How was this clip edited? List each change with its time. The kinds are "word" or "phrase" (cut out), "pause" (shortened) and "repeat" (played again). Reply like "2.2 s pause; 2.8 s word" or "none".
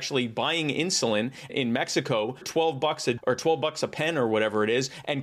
1.5 s word; 2.4 s word; 3.2 s word